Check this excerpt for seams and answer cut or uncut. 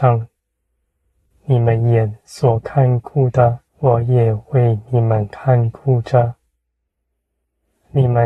cut